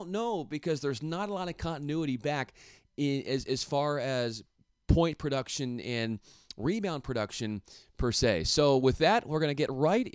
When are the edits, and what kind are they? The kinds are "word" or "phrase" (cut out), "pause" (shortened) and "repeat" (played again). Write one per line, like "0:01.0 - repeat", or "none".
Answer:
none